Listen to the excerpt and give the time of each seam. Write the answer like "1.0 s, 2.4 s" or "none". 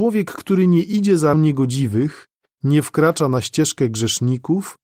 1.3 s